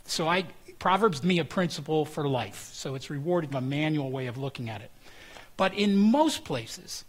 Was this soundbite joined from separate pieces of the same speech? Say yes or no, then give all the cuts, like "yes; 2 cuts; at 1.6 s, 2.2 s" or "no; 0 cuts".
yes; 2 cuts; at 1.2 s, 3.5 s